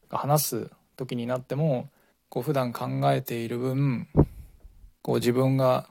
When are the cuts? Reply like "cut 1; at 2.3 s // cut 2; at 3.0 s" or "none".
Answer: cut 1; at 2.1 s // cut 2; at 5.0 s